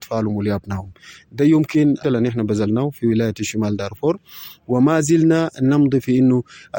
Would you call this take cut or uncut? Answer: cut